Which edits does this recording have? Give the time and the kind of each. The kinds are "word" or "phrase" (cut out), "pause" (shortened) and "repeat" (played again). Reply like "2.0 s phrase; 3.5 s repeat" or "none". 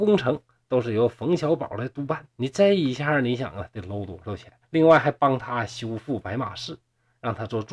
2.3 s pause; 4.6 s pause